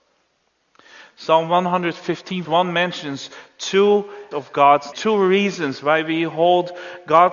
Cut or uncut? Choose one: cut